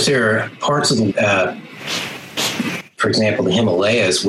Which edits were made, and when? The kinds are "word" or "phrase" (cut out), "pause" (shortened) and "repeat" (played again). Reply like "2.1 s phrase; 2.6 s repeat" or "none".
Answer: 1.1 s word

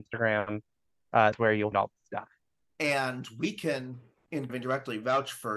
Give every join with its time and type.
1.3 s word; 1.7 s word; 4.5 s word

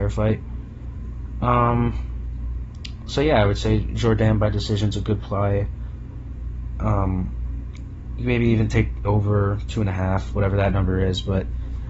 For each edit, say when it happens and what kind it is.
9.0 s phrase

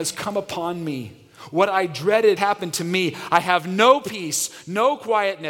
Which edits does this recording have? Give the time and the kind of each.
2.4 s word

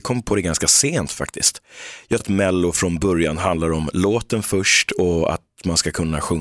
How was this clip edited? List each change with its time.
2.2 s word

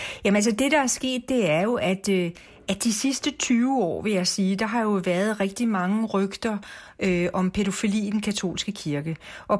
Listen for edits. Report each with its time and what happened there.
none

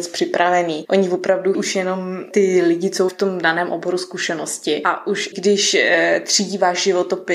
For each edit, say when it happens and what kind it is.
1.5 s word; 3.1 s phrase; 5.3 s word

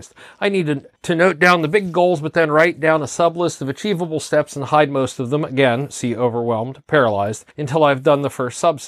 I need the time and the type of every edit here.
0.9 s pause; 7.5 s pause

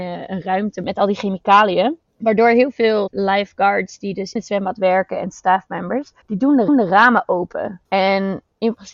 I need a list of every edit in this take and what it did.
2.1 s pause; 4.4 s word; 6.2 s pause; 6.7 s repeat; 7.8 s pause

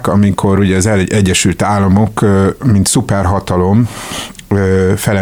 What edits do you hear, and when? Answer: none

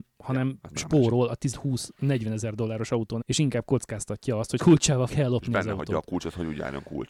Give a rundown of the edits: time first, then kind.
1.5 s word; 3.2 s word; 4.6 s word; 5.1 s word

